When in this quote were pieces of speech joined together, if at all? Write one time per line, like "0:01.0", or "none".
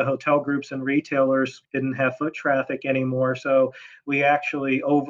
0:01.6

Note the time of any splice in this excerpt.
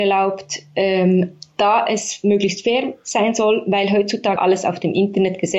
0:04.4

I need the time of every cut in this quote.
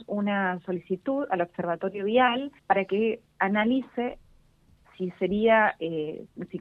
0:02.6

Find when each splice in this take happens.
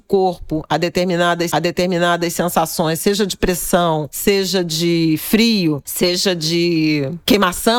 0:01.5

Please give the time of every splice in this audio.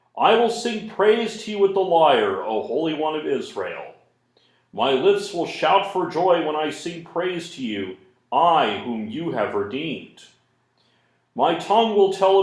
none

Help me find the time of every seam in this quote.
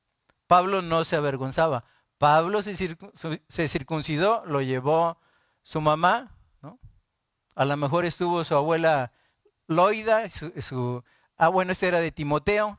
none

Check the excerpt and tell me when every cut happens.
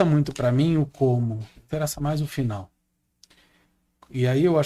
none

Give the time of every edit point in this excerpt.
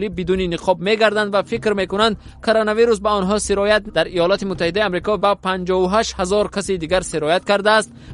0:03.9
0:05.2

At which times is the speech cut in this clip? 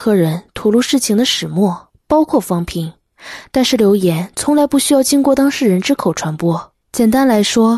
0:06.8

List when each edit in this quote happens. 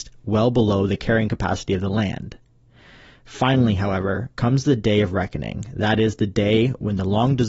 none

